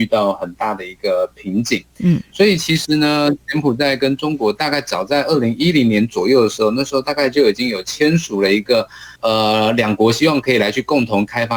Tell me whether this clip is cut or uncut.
cut